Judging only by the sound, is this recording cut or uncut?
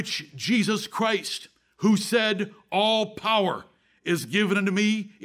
uncut